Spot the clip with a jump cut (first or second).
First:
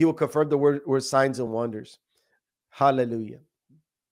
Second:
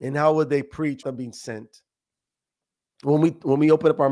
second